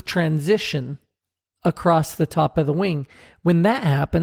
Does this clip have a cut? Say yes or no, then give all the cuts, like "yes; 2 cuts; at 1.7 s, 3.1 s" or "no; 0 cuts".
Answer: yes; 1 cut; at 1.2 s